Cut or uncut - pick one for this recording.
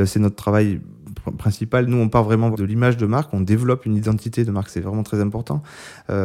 cut